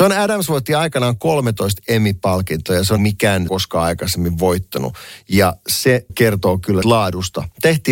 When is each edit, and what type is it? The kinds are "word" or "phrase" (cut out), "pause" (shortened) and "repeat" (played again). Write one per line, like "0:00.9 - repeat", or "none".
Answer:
0:03.0 - phrase
0:03.5 - phrase
0:06.1 - word
0:06.8 - word